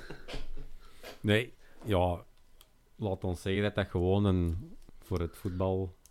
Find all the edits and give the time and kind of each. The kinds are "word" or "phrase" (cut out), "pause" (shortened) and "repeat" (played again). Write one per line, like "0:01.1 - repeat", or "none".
none